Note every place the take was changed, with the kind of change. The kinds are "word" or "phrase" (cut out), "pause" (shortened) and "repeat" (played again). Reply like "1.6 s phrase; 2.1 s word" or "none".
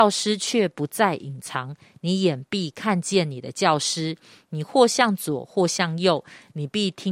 none